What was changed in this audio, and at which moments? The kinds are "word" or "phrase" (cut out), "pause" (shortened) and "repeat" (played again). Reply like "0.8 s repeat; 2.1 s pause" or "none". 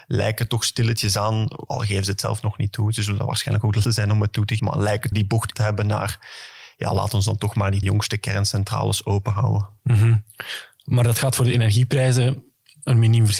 1.7 s word; 3.8 s word; 4.6 s word; 5.1 s word; 5.5 s word; 7.8 s word

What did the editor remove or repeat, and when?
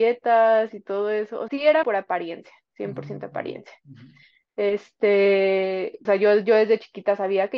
1.5 s word; 1.8 s word; 6.1 s word

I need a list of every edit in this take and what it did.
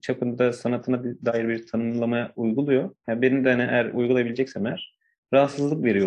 none

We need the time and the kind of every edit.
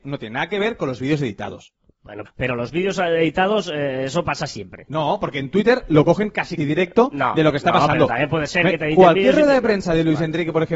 2.3 s word; 6.6 s word

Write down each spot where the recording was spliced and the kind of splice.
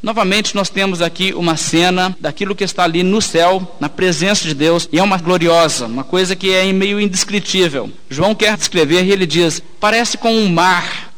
5.2 s word; 8.5 s word

